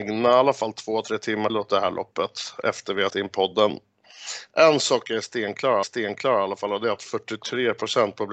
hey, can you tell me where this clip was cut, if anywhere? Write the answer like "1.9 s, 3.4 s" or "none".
1.5 s, 3.1 s, 5.1 s, 5.8 s